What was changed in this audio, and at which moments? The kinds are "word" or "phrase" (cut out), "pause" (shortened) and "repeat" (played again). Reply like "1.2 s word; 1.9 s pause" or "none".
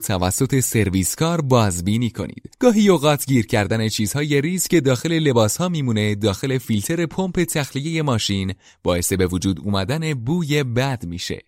2.5 s pause